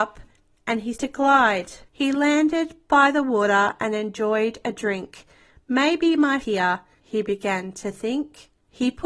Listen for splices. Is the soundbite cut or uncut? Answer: cut